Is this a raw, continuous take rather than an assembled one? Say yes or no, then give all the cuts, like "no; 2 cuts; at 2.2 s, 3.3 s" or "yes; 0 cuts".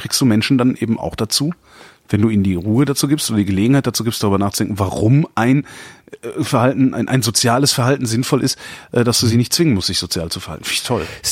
yes; 0 cuts